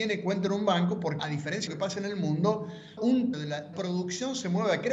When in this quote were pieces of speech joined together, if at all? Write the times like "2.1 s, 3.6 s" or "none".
1.2 s, 1.7 s, 3.0 s, 3.3 s, 3.7 s